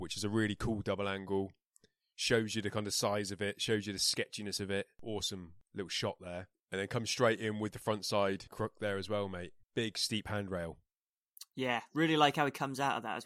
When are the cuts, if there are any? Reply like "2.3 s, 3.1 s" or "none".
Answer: 9.6 s